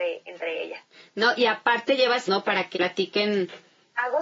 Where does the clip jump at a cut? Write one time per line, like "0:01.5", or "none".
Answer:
0:02.3
0:02.7